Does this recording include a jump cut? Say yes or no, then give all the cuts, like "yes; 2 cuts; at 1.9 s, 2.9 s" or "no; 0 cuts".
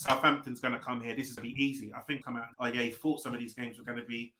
yes; 3 cuts; at 1.4 s, 2.2 s, 2.5 s